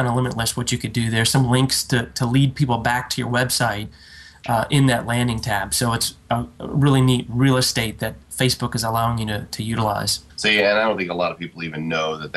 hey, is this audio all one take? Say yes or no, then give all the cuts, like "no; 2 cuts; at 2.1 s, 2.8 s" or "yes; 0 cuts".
no; 1 cut; at 10.3 s